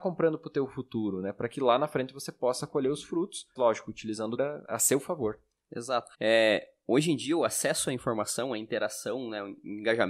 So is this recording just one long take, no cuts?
no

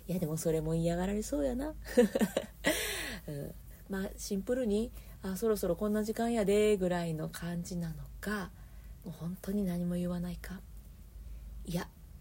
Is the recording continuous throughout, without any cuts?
yes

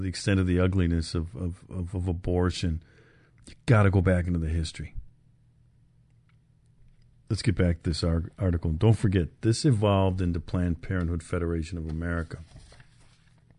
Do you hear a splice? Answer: no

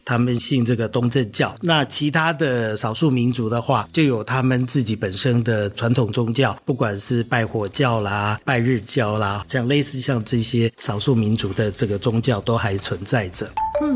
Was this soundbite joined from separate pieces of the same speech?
no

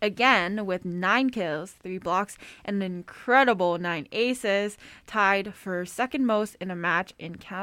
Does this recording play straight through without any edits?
yes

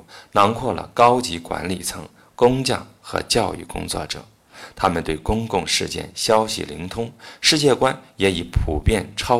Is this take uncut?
yes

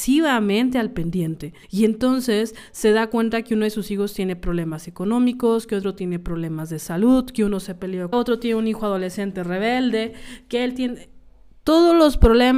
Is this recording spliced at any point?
yes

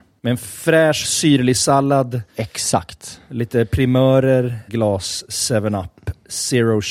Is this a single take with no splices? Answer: no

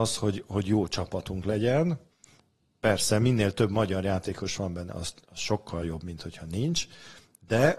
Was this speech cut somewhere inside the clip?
no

